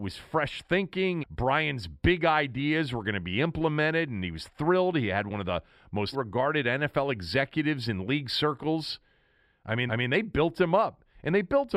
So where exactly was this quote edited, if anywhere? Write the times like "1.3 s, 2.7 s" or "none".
1.2 s, 6.1 s, 9.9 s